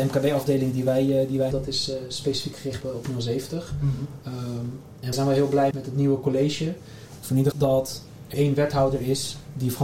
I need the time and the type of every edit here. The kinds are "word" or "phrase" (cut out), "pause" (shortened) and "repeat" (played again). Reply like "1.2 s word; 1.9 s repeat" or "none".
1.5 s word; 2.8 s word; 5.1 s word; 5.7 s word; 7.5 s word; 8.3 s word